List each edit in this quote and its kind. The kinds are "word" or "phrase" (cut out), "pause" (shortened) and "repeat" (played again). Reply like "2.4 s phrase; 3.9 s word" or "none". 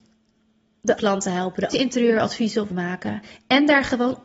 1.0 s word; 1.7 s word; 2.7 s word